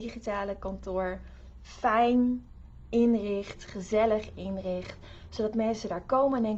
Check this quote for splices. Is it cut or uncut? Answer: uncut